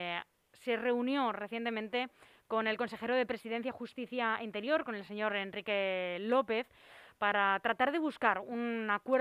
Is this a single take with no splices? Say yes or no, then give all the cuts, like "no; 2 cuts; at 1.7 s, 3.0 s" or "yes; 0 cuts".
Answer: yes; 0 cuts